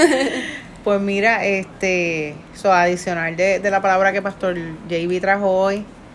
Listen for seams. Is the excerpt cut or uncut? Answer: uncut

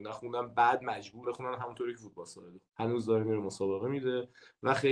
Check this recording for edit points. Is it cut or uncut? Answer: cut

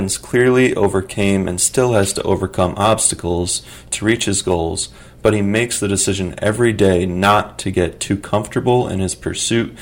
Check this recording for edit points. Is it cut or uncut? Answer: uncut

